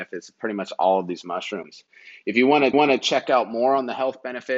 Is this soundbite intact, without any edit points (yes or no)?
no